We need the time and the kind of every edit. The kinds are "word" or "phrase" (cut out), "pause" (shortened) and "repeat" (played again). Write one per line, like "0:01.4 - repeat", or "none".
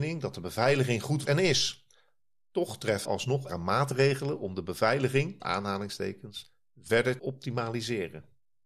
0:01.2 - word
0:03.0 - word
0:03.5 - word
0:05.4 - word
0:07.2 - word